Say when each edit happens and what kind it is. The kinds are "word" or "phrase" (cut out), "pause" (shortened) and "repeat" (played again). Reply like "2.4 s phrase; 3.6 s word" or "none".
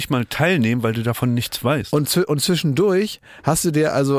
none